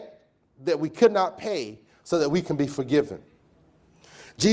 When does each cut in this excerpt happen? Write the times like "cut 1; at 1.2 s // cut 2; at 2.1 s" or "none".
none